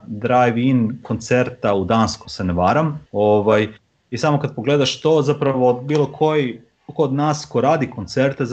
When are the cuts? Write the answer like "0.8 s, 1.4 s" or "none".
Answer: 2.2 s, 3.1 s